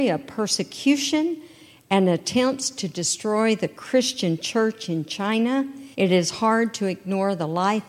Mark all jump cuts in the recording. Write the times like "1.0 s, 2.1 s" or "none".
5.9 s